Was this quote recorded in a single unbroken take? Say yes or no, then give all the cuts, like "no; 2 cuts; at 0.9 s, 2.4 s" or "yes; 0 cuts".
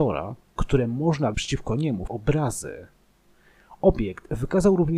no; 2 cuts; at 1.3 s, 2.1 s